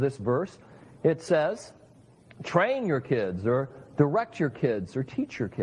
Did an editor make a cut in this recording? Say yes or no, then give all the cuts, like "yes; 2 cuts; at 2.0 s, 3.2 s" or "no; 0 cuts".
no; 0 cuts